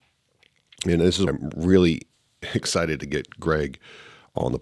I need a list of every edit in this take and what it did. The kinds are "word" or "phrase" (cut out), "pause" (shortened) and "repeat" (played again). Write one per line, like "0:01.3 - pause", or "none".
0:01.3 - word